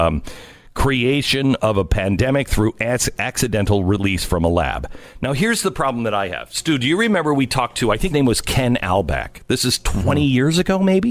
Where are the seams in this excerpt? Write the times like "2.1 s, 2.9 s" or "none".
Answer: 8.1 s